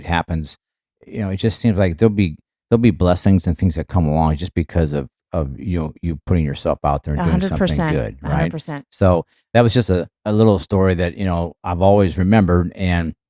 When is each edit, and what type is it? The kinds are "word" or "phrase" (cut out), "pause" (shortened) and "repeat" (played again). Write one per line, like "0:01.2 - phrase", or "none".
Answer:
none